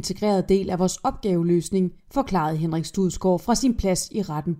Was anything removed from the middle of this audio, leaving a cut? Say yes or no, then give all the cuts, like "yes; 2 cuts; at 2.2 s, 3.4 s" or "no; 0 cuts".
no; 0 cuts